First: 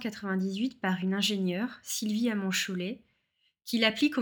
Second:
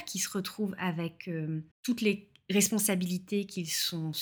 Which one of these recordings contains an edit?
second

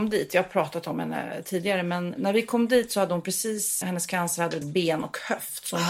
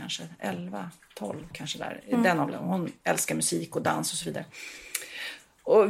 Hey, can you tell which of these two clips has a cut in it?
first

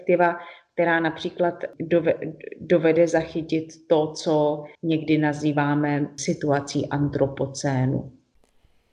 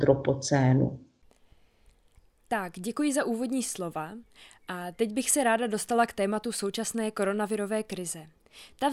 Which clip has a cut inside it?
first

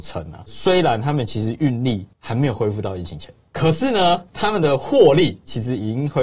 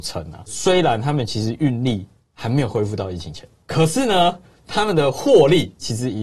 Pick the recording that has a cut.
first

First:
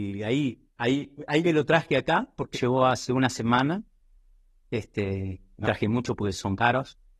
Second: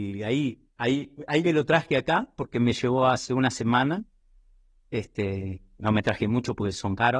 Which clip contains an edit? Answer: first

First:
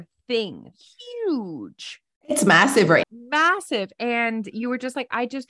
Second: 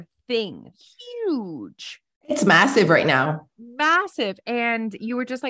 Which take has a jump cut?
first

